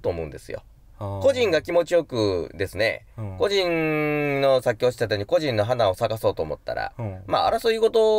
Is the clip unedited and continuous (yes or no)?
yes